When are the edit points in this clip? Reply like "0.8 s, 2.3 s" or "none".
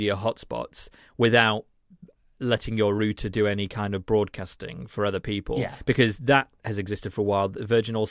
none